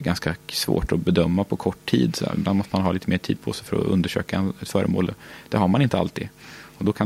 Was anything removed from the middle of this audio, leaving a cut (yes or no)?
no